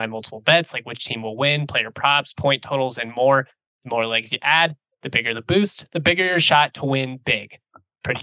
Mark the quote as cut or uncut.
uncut